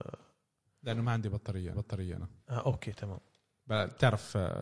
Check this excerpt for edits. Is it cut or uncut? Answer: cut